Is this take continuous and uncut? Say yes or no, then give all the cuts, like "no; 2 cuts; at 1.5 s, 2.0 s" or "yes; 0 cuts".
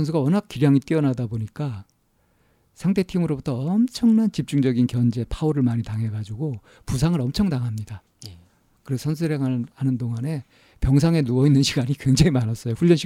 no; 1 cut; at 8.1 s